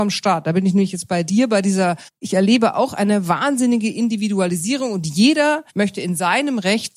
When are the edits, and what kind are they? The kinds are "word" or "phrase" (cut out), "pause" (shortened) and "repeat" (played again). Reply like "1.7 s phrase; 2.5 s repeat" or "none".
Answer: 2.1 s pause; 5.7 s pause